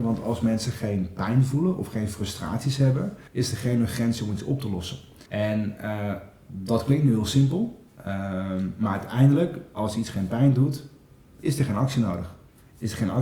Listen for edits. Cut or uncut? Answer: cut